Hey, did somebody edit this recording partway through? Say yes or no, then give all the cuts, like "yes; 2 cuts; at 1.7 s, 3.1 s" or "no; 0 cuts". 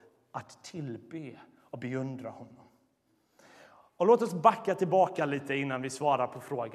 no; 0 cuts